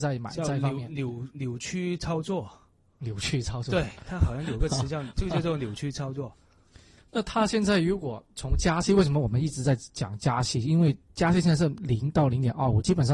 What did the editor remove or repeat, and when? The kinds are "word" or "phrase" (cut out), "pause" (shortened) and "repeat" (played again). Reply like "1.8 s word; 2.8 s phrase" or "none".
7.0 s word; 11.0 s pause